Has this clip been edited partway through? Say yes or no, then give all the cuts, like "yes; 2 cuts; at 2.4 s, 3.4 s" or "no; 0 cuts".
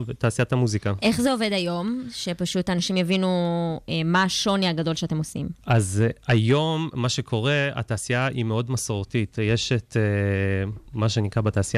no; 0 cuts